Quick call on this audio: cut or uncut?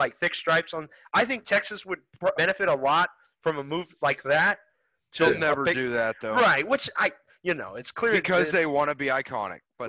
cut